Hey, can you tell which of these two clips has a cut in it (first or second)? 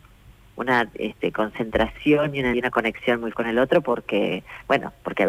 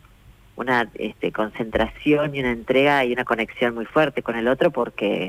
first